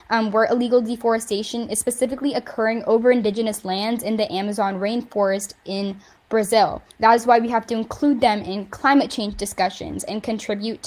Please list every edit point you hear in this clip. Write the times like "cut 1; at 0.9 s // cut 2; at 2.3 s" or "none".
cut 1; at 6.9 s